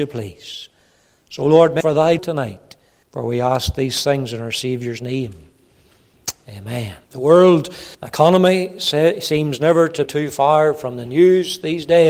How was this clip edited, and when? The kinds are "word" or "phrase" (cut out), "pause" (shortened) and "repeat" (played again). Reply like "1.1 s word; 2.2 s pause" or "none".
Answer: 1.8 s phrase; 2.2 s word; 3.0 s pause; 7.0 s pause; 7.9 s pause; 10.1 s word